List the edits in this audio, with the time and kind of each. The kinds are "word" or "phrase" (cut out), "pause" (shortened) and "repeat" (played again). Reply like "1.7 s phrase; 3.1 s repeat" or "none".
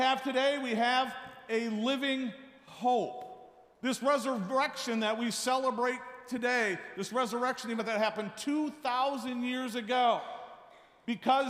none